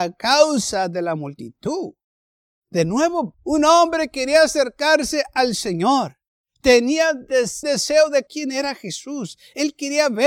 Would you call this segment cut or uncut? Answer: cut